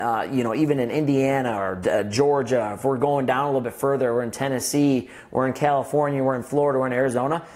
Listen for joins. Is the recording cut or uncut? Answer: uncut